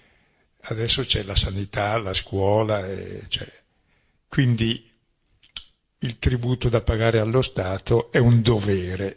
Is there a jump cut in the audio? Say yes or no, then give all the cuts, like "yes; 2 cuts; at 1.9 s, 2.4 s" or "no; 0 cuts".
no; 0 cuts